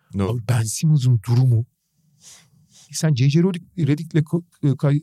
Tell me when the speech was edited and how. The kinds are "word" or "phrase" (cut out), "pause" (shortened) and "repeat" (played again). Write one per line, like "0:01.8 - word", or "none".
0:02.9 - phrase